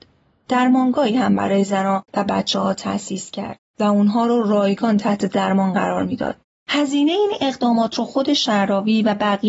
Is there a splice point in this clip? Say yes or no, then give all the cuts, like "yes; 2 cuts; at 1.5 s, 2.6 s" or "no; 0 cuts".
no; 0 cuts